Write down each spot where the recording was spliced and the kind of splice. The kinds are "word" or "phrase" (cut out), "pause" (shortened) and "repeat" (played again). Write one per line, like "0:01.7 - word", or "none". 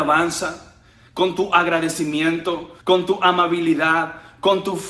0:02.8 - pause

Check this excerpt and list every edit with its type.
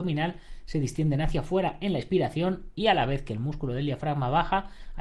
none

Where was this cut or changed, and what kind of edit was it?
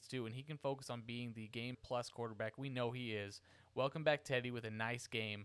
0:01.7 - word

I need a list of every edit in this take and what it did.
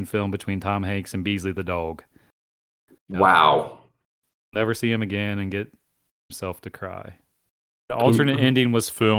none

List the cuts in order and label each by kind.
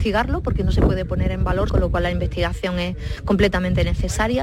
0:01.7 - phrase

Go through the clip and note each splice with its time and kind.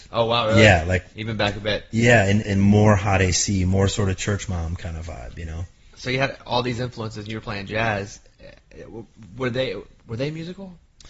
0:01.1 - word
0:02.4 - word

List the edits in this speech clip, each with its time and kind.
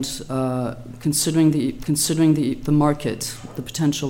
0:01.8 - repeat

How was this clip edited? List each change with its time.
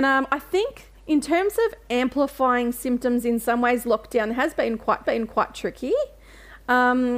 0:01.0 - pause
0:05.0 - repeat

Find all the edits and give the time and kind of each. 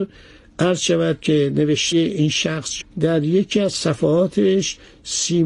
0:01.9 - word
0:02.8 - word

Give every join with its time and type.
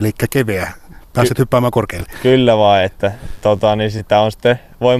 none

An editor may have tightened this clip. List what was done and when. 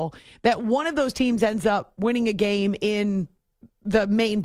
none

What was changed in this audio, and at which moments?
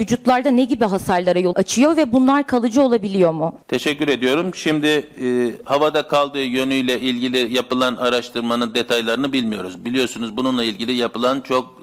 0:01.5 - word
0:03.6 - pause

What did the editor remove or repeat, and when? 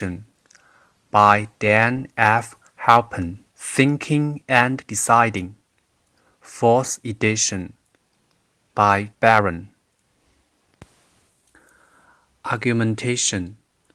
0:03.5 - pause
0:09.1 - word

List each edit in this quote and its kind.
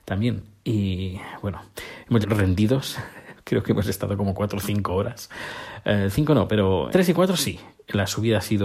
0:02.2 - phrase
0:06.9 - word

